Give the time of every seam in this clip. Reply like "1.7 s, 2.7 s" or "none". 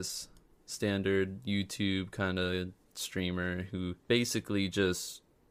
4.0 s